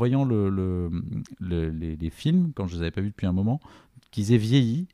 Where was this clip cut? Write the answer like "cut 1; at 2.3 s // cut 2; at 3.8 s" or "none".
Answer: none